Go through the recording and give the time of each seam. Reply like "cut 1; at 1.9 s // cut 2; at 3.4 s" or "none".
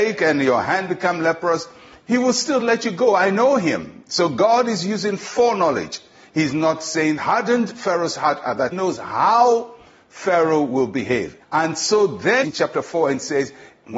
cut 1; at 2.6 s // cut 2; at 7.2 s // cut 3; at 8.7 s // cut 4; at 11.4 s // cut 5; at 12.4 s